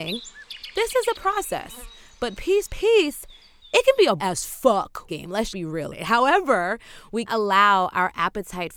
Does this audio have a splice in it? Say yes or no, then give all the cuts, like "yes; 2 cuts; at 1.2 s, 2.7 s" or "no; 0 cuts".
yes; 7 cuts; at 1.1 s, 2.7 s, 4.2 s, 5.1 s, 5.5 s, 5.9 s, 7.3 s